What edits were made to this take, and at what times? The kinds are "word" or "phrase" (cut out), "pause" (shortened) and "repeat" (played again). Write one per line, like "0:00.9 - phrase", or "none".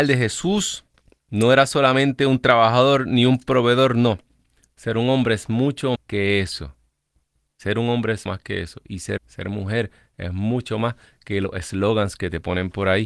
0:06.0 - word
0:08.3 - word
0:09.2 - word

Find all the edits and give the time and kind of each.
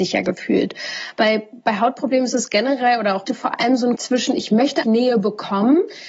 0:03.3 - phrase
0:04.0 - word
0:04.8 - word

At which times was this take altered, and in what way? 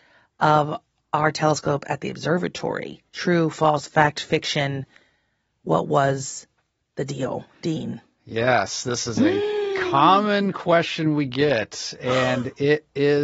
0:03.1 - pause

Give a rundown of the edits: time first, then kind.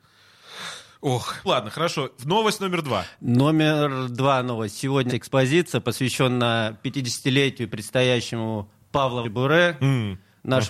0:01.5 - word
0:05.1 - word
0:09.2 - word

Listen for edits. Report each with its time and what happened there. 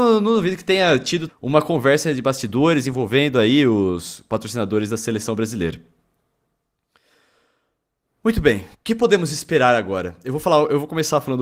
0:01.3 - word
0:08.7 - pause

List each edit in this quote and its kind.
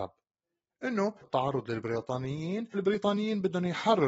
0:01.2 - word
0:02.7 - word

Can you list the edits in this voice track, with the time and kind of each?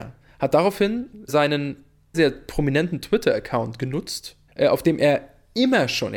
0:01.3 - word
0:02.1 - word
0:04.5 - pause

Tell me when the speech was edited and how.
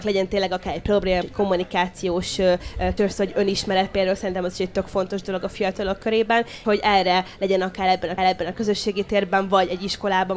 0:01.2 - word
0:03.0 - word
0:06.6 - word
0:08.2 - repeat

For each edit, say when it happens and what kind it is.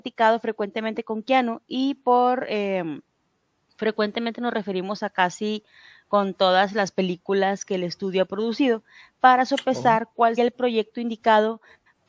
0:10.4 - word

